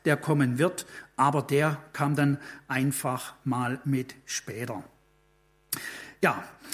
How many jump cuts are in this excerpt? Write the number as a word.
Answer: zero